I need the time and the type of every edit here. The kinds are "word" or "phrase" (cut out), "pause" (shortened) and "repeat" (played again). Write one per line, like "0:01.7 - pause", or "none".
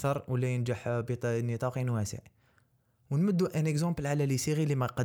none